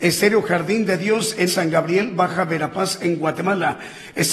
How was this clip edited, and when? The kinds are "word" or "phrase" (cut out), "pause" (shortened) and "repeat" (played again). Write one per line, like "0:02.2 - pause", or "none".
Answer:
0:01.5 - word